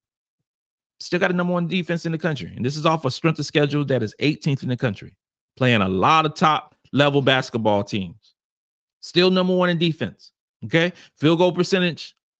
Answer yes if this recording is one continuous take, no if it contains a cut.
yes